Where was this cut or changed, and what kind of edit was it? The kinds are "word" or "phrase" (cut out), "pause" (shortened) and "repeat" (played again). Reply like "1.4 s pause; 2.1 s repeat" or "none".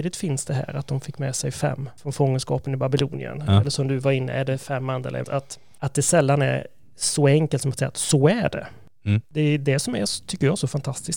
5.2 s word